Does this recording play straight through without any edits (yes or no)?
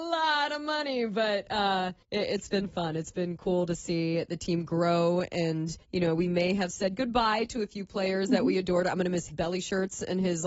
no